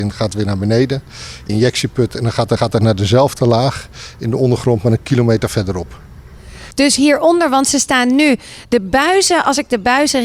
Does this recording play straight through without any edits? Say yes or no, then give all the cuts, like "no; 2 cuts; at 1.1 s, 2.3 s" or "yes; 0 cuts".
no; 2 cuts; at 1.5 s, 2.6 s